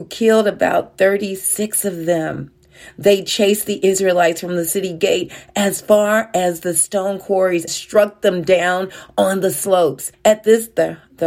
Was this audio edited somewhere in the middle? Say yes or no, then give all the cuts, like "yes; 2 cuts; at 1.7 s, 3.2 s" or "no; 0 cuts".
yes; 2 cuts; at 7.7 s, 10.1 s